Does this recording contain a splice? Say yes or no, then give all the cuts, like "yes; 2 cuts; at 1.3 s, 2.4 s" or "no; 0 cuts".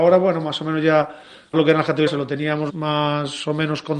yes; 3 cuts; at 1.5 s, 2.1 s, 2.7 s